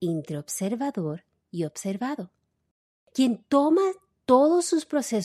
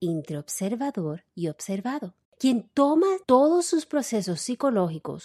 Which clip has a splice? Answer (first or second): second